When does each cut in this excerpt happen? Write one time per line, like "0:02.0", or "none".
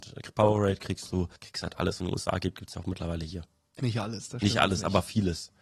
0:01.4
0:02.0
0:02.7
0:03.8